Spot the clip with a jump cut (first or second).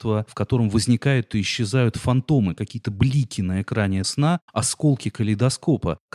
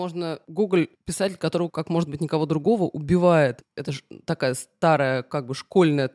first